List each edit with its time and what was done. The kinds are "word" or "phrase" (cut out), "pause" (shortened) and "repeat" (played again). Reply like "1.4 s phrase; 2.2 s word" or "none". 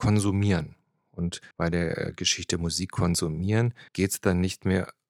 1.5 s pause; 3.9 s pause